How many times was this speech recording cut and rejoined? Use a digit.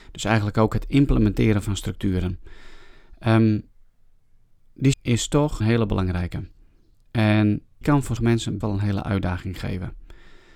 5